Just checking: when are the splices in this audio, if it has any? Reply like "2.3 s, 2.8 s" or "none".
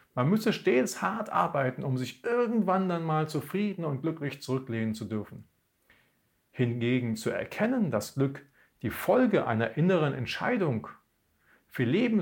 none